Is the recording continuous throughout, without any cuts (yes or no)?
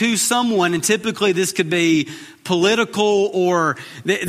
yes